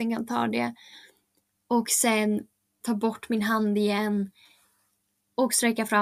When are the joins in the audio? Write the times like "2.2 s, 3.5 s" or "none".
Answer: 2.8 s